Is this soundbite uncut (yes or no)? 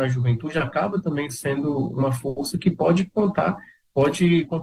yes